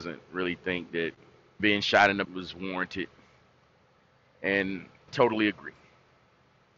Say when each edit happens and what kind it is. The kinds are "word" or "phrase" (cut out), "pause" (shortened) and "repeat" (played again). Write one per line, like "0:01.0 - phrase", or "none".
0:01.6 - word
0:02.2 - word
0:05.1 - word